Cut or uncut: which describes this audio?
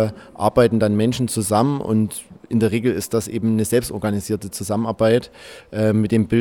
uncut